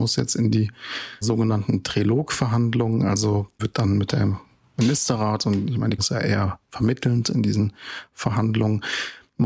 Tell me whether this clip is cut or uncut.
cut